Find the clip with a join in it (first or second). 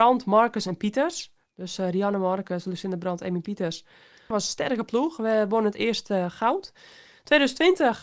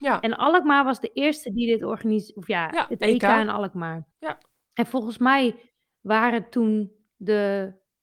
second